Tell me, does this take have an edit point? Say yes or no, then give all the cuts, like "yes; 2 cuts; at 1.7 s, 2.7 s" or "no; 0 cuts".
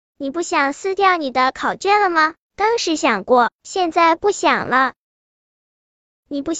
yes; 1 cut; at 2.4 s